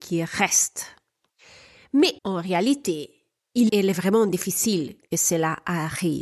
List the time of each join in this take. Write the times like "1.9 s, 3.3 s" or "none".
2.2 s, 3.7 s